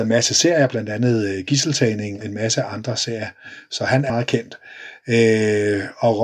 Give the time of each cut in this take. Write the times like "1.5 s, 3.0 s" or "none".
2.2 s, 4.1 s